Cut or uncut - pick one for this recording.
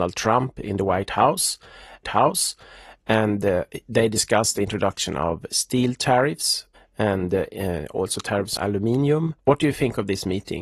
cut